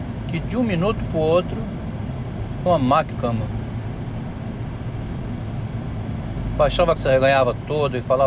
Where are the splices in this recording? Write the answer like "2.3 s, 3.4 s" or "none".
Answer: 2.7 s, 3.1 s, 7.0 s